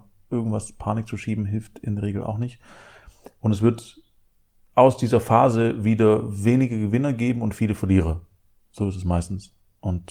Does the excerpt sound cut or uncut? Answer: uncut